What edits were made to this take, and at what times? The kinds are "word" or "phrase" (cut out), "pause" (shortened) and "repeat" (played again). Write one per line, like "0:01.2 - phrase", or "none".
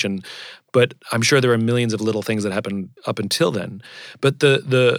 0:03.0 - pause